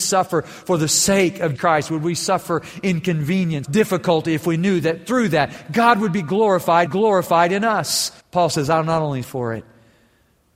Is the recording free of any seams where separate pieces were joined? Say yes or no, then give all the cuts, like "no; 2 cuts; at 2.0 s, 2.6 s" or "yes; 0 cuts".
no; 5 cuts; at 1.6 s, 3.6 s, 6.9 s, 8.2 s, 9.2 s